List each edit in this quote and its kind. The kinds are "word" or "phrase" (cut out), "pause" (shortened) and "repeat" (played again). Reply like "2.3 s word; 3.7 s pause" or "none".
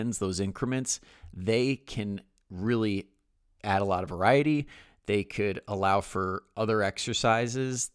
none

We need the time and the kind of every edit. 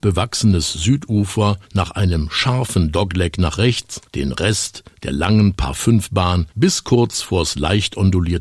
1.6 s pause; 4.1 s pause; 6.5 s pause

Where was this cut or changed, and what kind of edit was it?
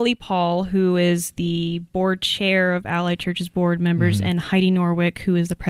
none

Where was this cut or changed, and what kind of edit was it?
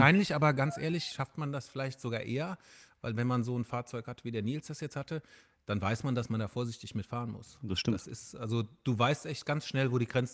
none

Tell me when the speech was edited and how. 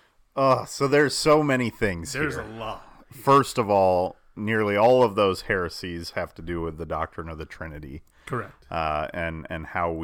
none

